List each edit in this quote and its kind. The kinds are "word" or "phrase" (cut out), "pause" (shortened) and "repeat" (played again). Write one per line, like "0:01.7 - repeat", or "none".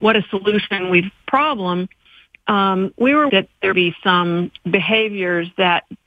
0:01.2 - phrase
0:03.3 - word
0:03.7 - word
0:04.6 - pause